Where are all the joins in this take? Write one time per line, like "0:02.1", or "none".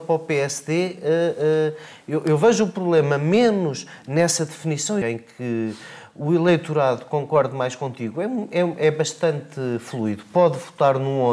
0:05.0